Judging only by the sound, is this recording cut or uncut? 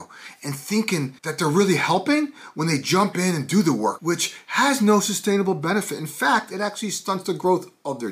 cut